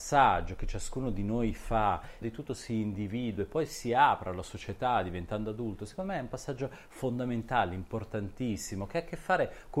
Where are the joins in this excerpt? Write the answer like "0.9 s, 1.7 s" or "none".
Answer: 2.2 s